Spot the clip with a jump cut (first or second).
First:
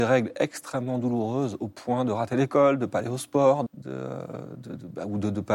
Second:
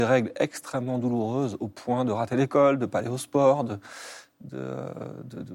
first